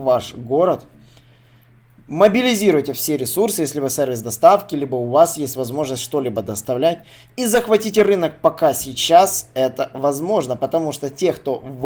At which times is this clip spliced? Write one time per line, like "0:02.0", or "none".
none